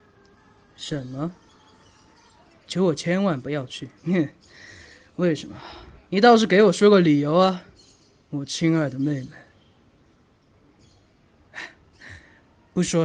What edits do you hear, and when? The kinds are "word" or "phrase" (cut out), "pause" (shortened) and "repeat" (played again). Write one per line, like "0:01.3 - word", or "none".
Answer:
0:04.0 - pause